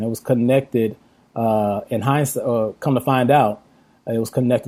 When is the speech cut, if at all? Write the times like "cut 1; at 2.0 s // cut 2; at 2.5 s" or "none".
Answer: none